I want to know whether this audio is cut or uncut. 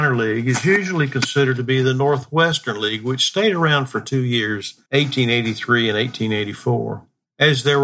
cut